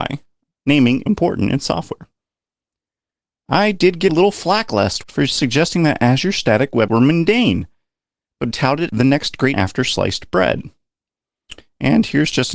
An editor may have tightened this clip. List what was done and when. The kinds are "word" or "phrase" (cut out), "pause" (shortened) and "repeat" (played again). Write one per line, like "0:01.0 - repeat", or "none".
0:01.1 - word
0:04.1 - word
0:05.0 - word
0:06.9 - word
0:08.5 - word
0:08.9 - word
0:09.5 - word